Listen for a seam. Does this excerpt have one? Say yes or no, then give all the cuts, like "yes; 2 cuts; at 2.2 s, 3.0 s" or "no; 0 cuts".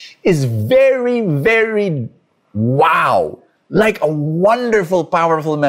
no; 0 cuts